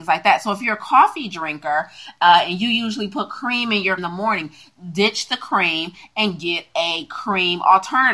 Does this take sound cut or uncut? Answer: cut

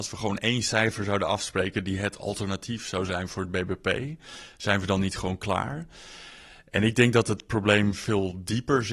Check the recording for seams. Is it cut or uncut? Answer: uncut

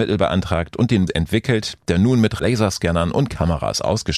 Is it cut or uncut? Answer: cut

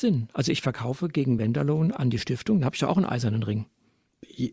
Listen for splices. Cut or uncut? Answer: uncut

